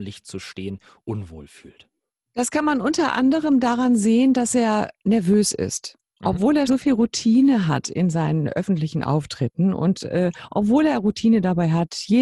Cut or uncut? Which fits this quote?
cut